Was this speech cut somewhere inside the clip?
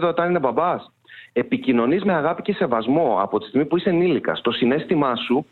no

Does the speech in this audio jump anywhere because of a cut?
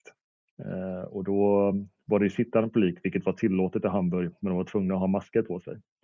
no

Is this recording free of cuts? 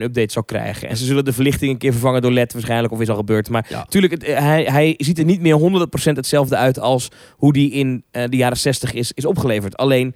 yes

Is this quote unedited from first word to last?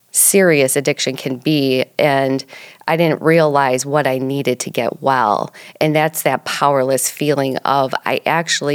yes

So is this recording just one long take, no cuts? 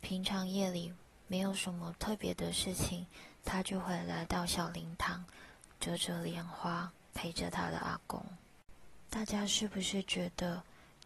no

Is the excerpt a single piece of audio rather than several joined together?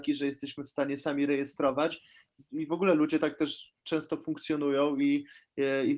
yes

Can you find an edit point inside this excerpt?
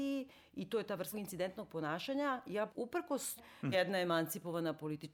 yes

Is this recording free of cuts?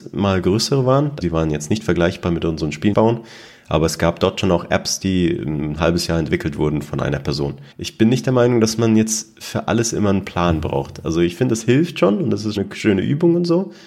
no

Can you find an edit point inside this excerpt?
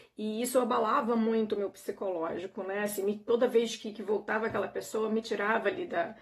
no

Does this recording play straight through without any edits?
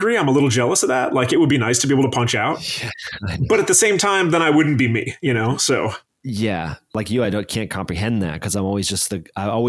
yes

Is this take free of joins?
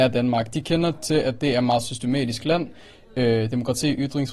yes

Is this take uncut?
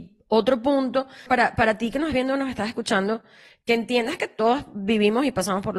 no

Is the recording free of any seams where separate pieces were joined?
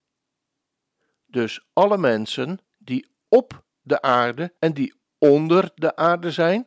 no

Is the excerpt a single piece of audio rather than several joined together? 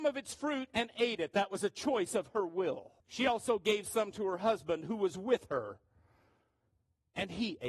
no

